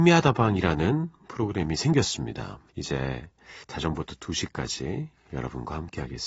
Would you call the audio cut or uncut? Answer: cut